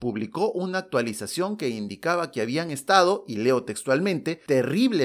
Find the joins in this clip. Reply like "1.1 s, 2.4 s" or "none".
none